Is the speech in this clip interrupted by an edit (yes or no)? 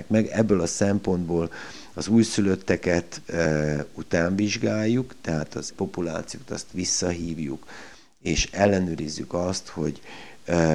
yes